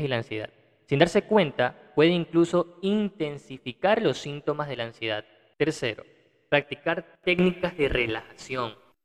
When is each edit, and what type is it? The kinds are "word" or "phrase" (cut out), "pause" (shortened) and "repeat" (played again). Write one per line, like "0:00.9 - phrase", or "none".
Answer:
none